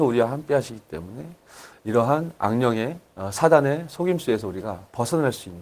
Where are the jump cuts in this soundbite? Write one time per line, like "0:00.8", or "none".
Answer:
none